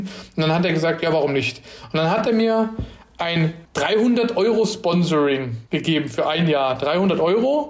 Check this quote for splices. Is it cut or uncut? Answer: cut